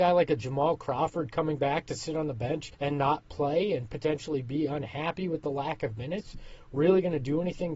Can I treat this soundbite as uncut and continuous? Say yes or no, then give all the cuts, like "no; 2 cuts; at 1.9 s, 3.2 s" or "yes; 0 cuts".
no; 1 cut; at 2.7 s